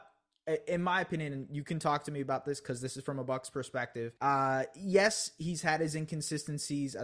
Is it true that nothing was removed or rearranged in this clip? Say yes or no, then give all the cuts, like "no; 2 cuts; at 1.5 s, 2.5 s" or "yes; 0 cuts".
no; 1 cut; at 4.2 s